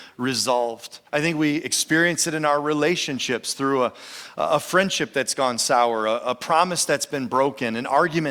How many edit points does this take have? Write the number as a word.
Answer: one